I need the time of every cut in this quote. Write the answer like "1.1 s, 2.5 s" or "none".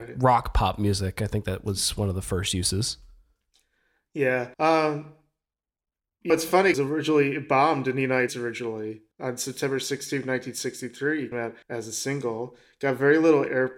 4.5 s, 6.3 s, 6.7 s, 8.3 s, 9.1 s, 11.3 s, 11.6 s

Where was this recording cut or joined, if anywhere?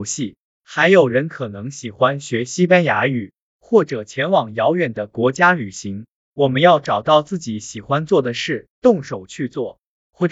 8.7 s

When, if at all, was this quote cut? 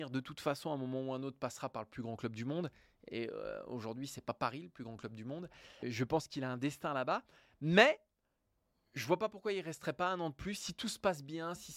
5.8 s

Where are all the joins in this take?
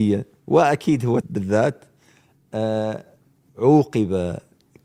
1.2 s

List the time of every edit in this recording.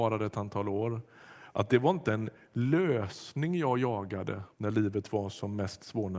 4.5 s

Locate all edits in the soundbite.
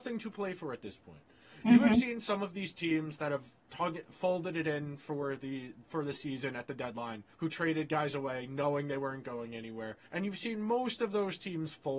7.3 s, 10.0 s

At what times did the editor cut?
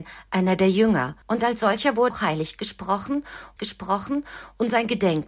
1.2 s, 2.1 s, 3.6 s

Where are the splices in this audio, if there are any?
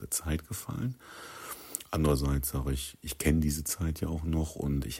none

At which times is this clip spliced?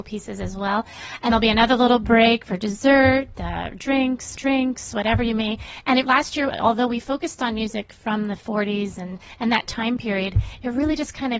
1.3 s, 4.3 s, 6.0 s

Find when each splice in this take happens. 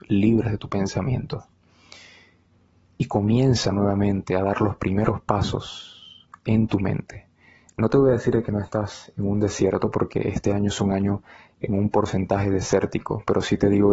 none

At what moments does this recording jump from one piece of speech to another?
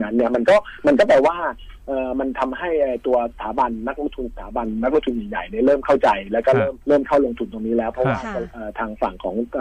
6.8 s

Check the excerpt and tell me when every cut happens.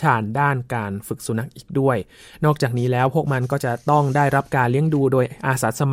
none

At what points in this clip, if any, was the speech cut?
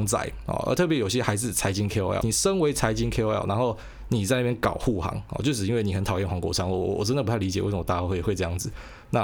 2.2 s

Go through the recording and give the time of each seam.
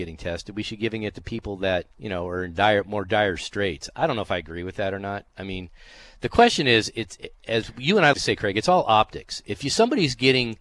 1.9 s, 5.3 s, 7.2 s, 8.1 s

